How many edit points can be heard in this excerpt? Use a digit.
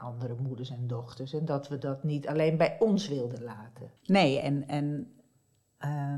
1